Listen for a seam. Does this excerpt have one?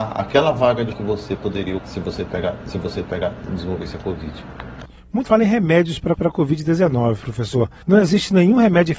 yes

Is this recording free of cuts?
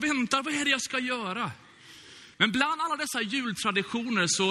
no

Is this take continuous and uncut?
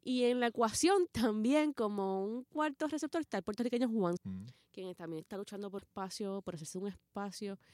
no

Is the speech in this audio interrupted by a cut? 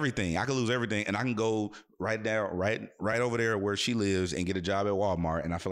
no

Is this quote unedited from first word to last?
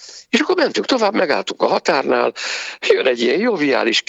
yes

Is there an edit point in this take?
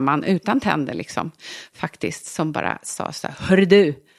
no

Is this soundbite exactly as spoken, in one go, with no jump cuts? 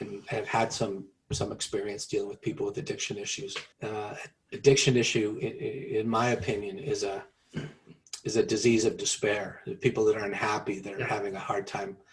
no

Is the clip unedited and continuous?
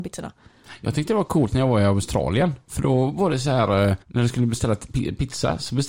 no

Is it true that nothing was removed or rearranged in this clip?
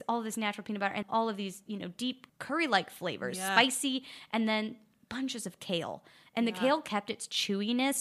no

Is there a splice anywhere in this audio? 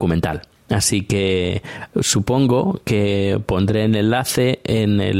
no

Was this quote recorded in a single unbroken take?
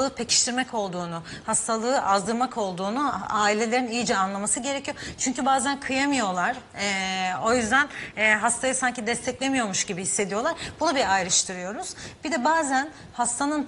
yes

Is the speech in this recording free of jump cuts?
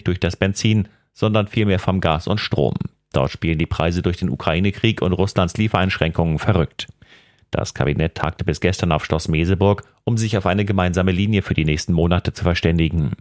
yes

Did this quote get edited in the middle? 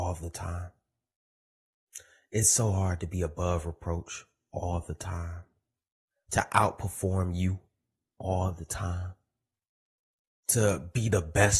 no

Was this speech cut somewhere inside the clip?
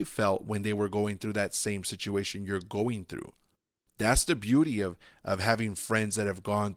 no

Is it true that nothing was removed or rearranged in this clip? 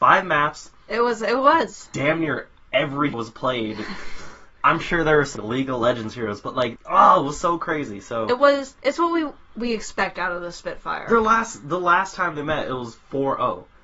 no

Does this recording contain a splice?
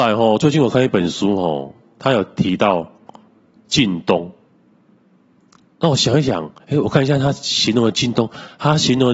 no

